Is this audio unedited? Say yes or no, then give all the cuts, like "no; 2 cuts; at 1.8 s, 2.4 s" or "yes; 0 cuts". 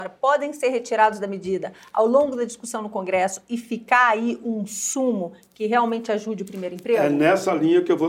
yes; 0 cuts